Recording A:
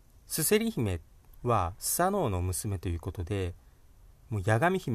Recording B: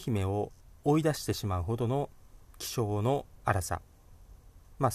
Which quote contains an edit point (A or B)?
B